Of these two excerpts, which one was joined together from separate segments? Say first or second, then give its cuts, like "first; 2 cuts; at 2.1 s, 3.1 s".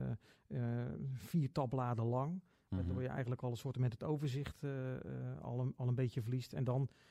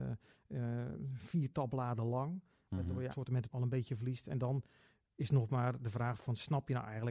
second; 2 cuts; at 3.1 s, 3.5 s